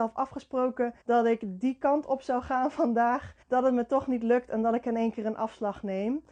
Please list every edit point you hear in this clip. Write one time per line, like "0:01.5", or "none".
0:01.0
0:03.4